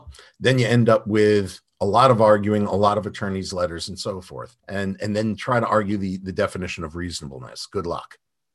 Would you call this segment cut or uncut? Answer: cut